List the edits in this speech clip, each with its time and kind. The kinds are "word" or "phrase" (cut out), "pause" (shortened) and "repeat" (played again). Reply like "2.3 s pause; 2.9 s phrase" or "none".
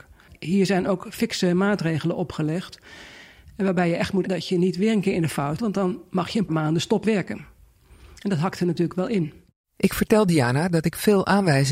4.2 s word; 5.6 s word; 6.5 s word; 7.0 s word